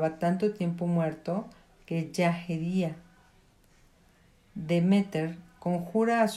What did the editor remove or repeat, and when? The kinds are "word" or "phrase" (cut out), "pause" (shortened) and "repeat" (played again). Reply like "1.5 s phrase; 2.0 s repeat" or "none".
none